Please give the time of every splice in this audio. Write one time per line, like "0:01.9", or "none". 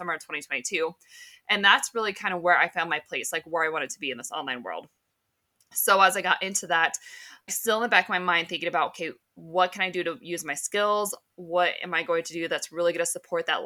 0:07.5